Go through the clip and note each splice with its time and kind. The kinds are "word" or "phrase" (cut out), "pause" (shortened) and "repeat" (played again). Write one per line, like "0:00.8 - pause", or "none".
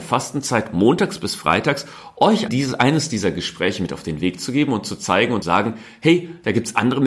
0:02.5 - word
0:05.4 - word